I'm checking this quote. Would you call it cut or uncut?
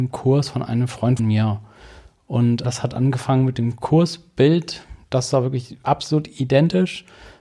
cut